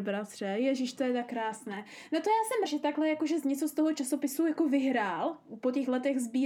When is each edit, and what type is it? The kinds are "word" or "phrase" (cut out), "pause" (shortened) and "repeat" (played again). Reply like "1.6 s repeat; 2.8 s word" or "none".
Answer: 2.6 s word